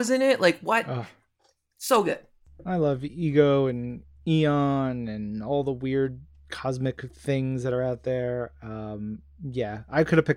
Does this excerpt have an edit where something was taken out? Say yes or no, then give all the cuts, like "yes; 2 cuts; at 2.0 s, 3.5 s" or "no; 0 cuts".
no; 0 cuts